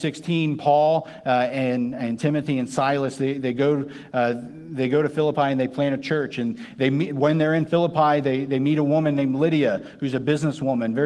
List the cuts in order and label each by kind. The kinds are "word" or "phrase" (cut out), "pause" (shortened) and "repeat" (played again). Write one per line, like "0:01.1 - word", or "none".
none